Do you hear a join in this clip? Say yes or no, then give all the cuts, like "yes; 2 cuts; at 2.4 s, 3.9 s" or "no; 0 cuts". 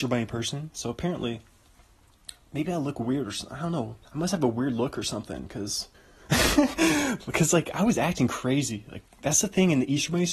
yes; 2 cuts; at 4.0 s, 5.9 s